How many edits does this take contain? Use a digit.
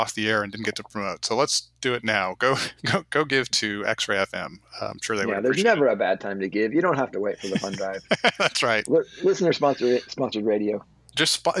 0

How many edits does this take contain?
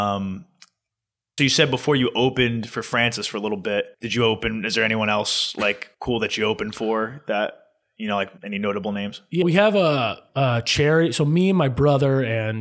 6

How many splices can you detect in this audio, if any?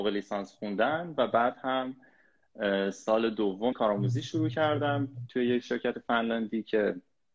1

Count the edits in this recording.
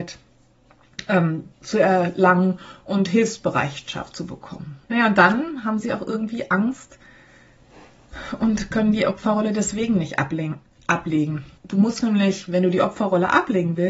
3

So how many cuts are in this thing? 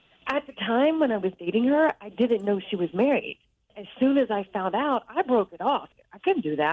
0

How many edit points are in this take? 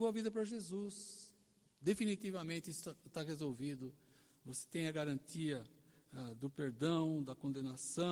0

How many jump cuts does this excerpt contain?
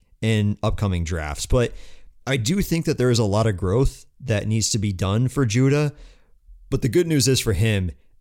0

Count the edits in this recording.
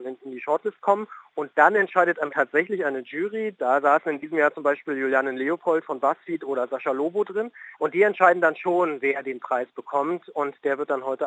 2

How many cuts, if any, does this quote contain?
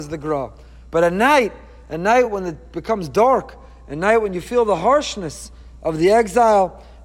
0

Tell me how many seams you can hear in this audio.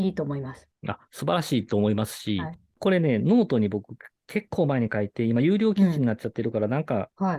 0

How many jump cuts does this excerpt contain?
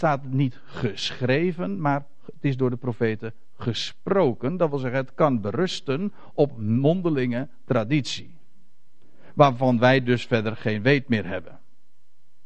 0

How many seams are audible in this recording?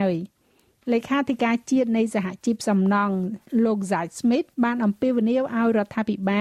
1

